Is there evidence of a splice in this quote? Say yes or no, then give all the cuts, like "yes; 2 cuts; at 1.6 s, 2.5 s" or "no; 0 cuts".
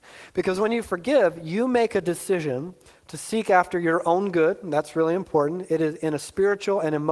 no; 0 cuts